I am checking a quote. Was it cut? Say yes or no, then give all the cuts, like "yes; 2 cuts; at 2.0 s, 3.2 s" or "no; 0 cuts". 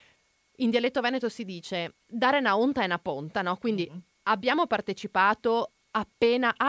yes; 1 cut; at 2.0 s